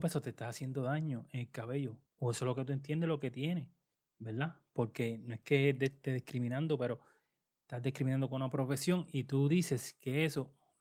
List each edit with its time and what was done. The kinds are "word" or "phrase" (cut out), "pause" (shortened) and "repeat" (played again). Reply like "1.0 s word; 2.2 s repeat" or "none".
2.1 s pause